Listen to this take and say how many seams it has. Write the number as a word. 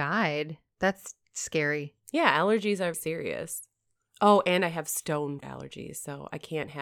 two